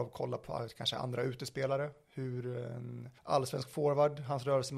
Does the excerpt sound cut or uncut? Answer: cut